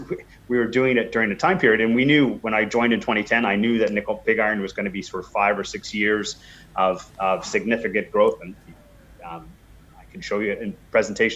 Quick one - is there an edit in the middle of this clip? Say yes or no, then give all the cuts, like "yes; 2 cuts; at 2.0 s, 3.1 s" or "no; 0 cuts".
no; 0 cuts